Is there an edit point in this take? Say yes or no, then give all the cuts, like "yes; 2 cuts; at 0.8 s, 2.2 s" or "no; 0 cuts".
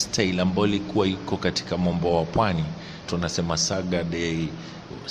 yes; 1 cut; at 3.1 s